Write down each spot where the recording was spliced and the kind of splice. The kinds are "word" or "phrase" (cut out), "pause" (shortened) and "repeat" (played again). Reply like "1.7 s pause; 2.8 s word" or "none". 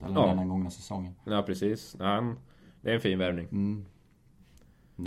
none